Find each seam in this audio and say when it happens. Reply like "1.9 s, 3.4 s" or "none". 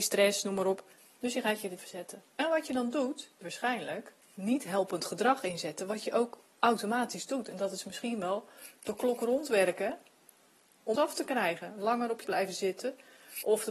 1.8 s, 2.3 s, 3.4 s, 4.2 s, 11.0 s, 12.2 s